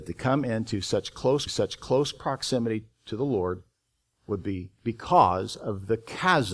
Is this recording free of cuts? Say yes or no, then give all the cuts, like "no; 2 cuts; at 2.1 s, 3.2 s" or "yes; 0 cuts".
no; 1 cut; at 1.5 s